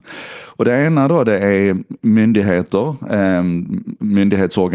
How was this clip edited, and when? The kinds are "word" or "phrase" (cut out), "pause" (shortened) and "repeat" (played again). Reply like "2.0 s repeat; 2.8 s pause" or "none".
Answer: none